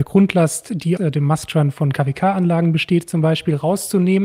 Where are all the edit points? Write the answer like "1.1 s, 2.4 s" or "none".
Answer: 1.0 s